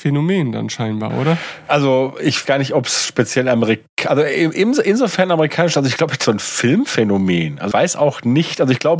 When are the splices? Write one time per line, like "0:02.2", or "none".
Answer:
0:02.5
0:06.2
0:07.7